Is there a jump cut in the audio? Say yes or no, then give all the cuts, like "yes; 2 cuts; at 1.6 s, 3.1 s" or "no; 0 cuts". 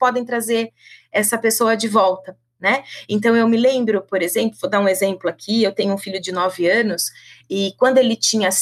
no; 0 cuts